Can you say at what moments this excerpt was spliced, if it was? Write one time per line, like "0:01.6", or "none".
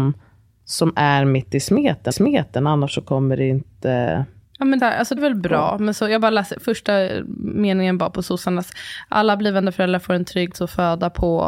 0:02.1
0:04.4
0:04.8
0:05.2
0:10.5